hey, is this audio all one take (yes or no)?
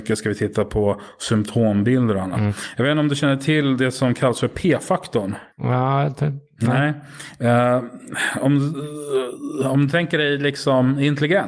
no